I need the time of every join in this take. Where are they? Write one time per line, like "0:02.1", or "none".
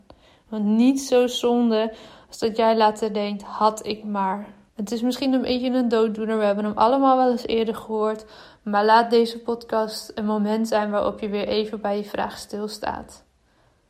0:04.7